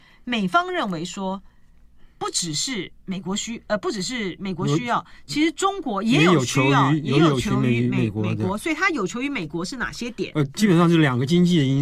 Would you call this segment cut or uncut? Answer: uncut